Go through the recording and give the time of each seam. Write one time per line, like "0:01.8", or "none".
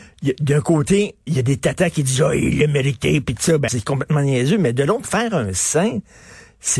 0:01.3
0:03.7
0:05.0